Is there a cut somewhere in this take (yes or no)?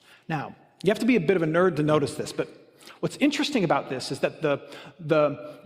no